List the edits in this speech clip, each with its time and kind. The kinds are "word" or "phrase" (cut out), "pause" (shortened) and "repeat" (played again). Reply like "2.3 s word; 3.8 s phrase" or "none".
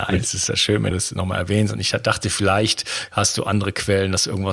0.9 s word